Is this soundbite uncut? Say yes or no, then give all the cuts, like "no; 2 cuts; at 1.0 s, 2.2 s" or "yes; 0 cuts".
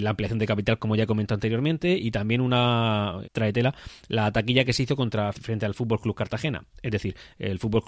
no; 2 cuts; at 3.2 s, 5.3 s